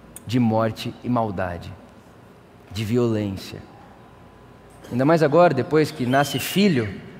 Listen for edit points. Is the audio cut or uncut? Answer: uncut